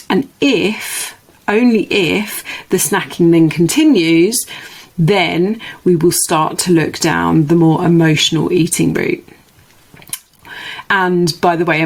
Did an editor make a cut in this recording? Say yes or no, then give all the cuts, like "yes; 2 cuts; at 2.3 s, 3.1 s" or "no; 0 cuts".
no; 0 cuts